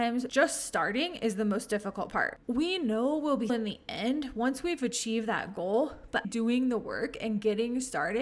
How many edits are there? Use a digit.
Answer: 3